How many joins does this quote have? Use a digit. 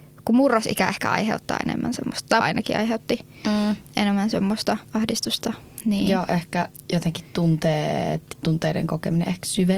3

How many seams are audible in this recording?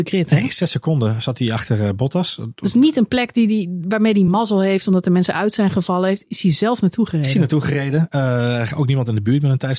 0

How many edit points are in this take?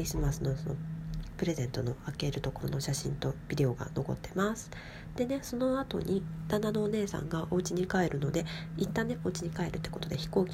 0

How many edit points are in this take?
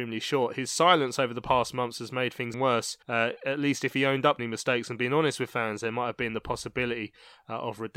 3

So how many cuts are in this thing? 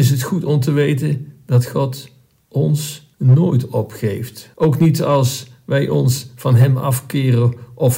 2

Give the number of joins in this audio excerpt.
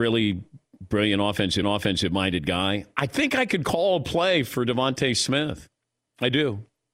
1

